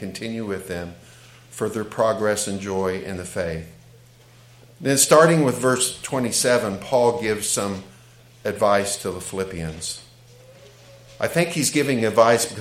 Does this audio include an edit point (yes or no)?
no